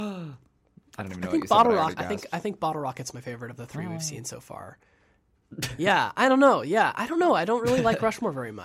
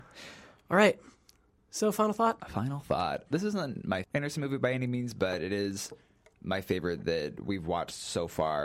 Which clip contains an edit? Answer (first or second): second